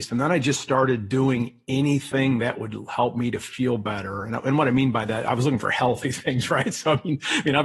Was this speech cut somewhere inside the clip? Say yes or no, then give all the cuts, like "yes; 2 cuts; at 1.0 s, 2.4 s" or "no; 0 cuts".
no; 0 cuts